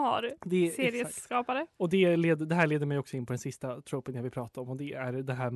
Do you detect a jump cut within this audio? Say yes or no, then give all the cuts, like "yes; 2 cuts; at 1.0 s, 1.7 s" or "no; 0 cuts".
no; 0 cuts